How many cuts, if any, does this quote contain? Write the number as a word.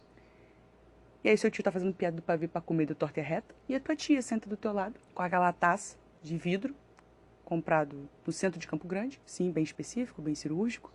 three